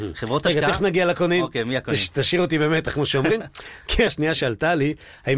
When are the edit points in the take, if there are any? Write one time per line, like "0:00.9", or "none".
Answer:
0:04.1